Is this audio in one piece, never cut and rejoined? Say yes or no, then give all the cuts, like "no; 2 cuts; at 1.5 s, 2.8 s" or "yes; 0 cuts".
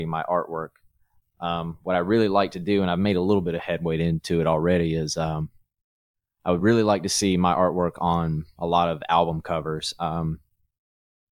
yes; 0 cuts